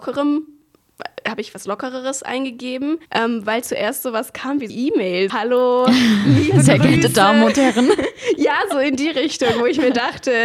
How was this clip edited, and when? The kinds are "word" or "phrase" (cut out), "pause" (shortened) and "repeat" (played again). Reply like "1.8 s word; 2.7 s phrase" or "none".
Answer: 3.1 s pause; 4.7 s word; 5.3 s word